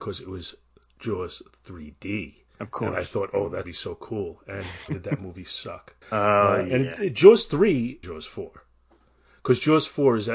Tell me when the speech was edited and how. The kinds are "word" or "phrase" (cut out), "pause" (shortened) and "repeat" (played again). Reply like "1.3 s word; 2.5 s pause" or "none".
2.5 s pause; 3.6 s phrase; 4.9 s word; 6.0 s pause; 8.0 s phrase